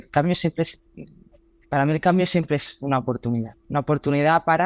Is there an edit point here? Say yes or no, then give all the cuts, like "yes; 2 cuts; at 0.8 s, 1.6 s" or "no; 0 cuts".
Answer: no; 0 cuts